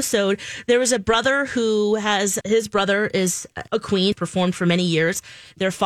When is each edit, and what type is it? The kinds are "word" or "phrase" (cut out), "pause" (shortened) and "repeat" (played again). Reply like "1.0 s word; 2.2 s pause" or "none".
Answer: 2.4 s word; 3.7 s pause; 4.1 s phrase